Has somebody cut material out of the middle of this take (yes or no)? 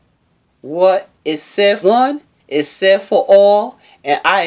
yes